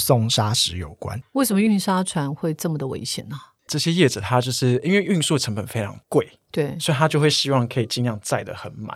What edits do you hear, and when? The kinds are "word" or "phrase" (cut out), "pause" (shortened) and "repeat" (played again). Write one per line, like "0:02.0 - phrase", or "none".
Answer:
0:03.6 - pause
0:06.0 - pause

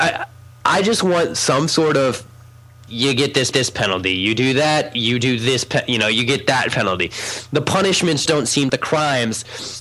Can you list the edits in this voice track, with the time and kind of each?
0:02.9 - phrase
0:03.5 - repeat
0:08.3 - word
0:08.7 - phrase

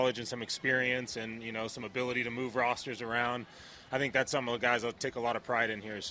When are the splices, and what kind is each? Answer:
none

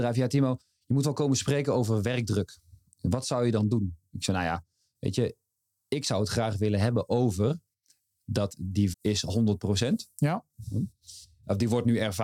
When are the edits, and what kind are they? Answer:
0:08.9 - word

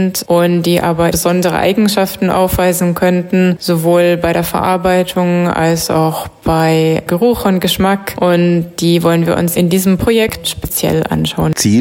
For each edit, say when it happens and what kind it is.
0:09.5 - word
0:10.4 - word

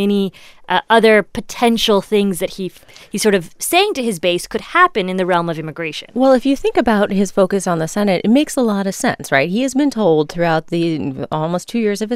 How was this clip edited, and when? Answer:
none

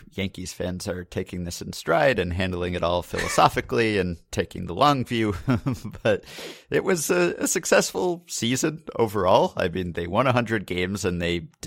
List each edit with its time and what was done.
none

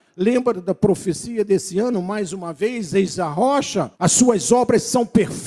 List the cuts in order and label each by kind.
0:03.9 - pause

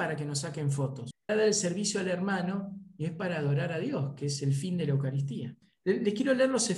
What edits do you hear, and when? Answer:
0:01.3 - phrase

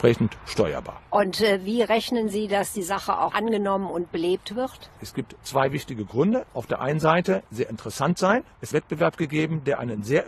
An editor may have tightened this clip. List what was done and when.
0:01.0 - pause
0:03.3 - word
0:07.5 - phrase
0:08.7 - phrase

